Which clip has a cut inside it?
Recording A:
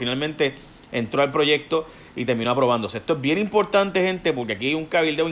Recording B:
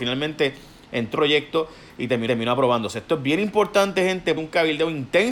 B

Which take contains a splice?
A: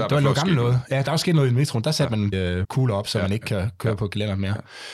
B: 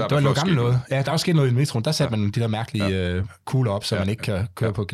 A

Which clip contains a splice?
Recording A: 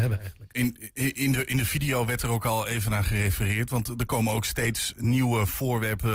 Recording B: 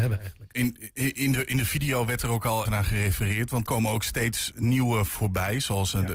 B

